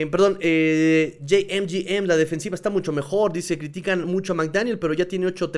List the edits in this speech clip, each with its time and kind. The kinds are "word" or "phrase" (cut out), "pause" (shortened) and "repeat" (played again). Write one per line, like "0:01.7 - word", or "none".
none